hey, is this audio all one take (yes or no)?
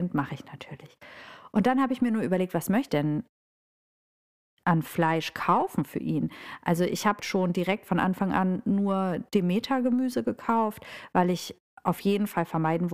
no